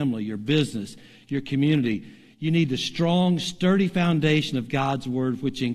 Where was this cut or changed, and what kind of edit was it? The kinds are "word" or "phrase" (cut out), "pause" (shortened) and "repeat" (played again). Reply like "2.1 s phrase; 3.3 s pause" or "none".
none